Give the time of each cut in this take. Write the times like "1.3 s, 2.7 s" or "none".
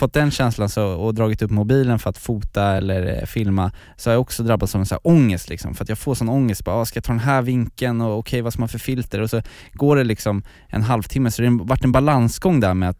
none